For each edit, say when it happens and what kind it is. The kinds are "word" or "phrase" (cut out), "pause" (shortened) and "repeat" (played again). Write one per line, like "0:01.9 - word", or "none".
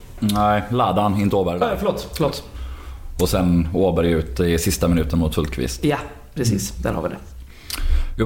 none

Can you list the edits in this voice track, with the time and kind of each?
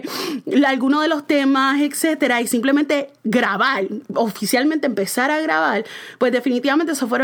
0:03.2 - pause

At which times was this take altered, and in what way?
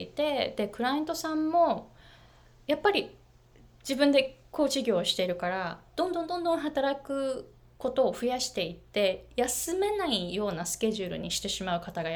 none

